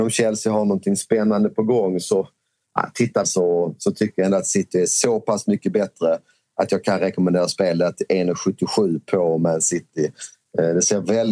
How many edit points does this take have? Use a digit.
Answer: 1